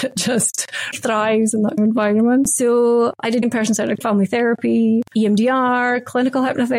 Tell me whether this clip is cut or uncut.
cut